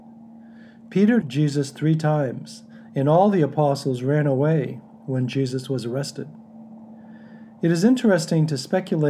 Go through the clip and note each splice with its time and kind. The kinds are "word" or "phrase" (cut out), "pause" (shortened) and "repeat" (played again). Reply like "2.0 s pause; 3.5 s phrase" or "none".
1.2 s word